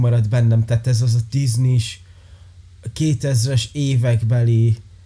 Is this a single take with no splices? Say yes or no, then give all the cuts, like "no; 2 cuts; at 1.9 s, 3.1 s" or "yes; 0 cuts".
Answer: no; 1 cut; at 1.3 s